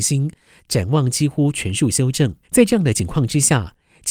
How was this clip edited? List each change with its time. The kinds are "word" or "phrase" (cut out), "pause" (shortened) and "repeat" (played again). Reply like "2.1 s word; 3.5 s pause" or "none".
2.4 s pause